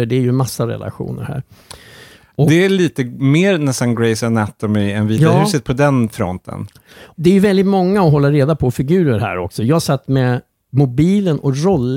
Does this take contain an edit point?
no; 0 cuts

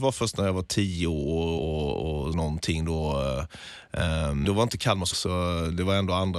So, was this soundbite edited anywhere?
yes; 4 cuts; at 1.6 s, 2.3 s, 4.4 s, 5.1 s

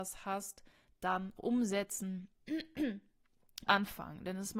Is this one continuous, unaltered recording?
no; 2 cuts; at 1.4 s, 3.7 s

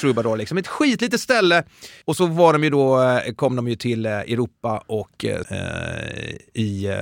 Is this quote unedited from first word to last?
no; 1 cut; at 5.4 s

